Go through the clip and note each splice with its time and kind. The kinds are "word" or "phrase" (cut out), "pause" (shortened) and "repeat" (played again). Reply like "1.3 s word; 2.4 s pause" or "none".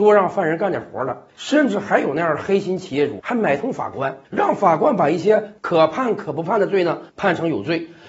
1.3 s pause; 3.2 s word; 4.2 s pause; 7.1 s pause